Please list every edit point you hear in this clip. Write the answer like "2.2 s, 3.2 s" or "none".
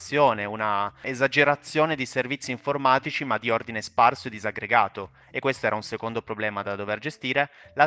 none